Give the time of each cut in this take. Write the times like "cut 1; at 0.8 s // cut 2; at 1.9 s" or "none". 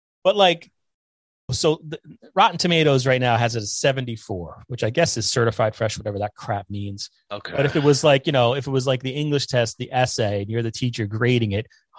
cut 1; at 1.5 s